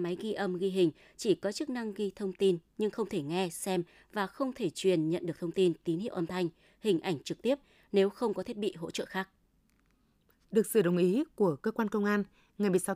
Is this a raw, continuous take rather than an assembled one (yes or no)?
yes